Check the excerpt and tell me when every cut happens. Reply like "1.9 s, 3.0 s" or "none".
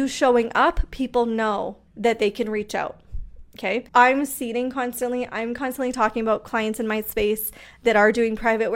1.9 s, 3.9 s